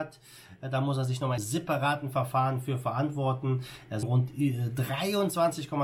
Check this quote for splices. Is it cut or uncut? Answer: cut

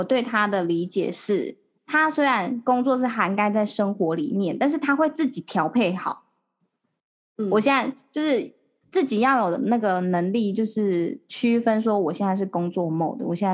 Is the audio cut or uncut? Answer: uncut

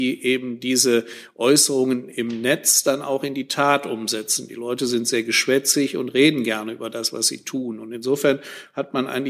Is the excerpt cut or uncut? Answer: uncut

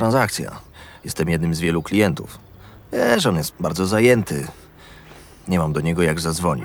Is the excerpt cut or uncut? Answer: cut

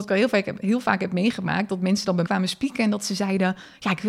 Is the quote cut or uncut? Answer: cut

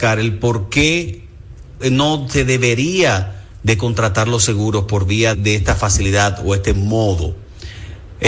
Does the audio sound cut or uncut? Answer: cut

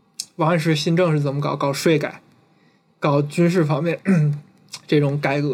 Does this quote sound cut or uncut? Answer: uncut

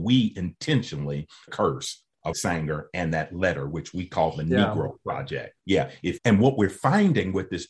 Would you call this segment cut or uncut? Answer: cut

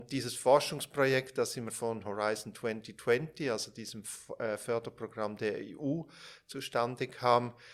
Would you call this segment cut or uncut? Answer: cut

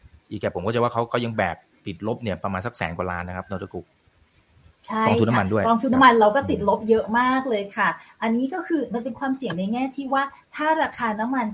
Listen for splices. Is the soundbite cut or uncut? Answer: uncut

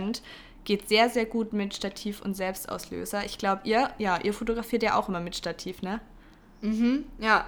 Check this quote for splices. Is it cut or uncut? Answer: uncut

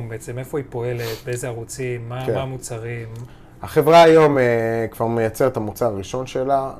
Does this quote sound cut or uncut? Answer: uncut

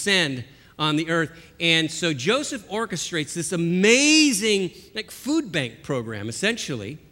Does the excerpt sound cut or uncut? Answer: uncut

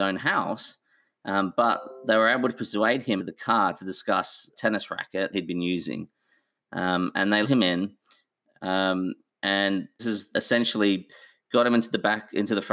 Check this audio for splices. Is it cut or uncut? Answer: cut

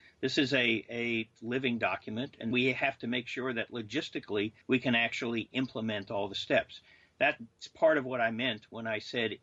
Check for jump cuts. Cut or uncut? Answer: cut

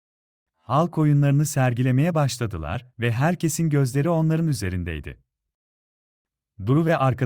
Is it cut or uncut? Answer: uncut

